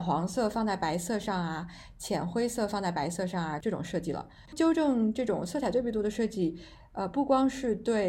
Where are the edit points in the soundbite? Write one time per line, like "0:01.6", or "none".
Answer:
0:04.5

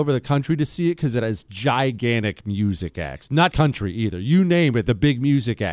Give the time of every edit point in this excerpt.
0:03.5

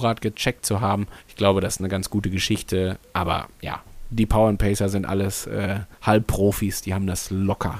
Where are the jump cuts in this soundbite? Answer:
0:01.2
0:05.9

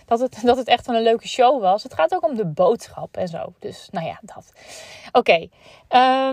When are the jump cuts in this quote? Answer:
none

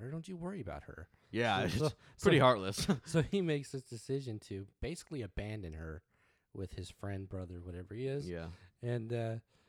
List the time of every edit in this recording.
none

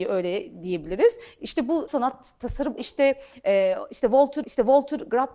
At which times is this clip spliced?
0:01.9
0:02.8
0:04.4

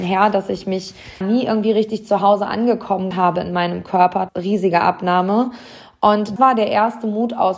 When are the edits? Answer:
0:01.2
0:03.1
0:04.3
0:06.4

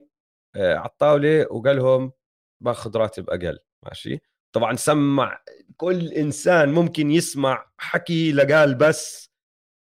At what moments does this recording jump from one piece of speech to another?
none

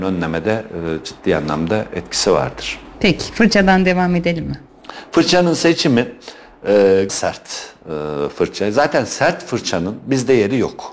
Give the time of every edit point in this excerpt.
0:07.1

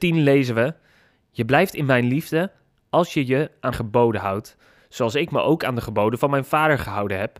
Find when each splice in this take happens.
0:03.7

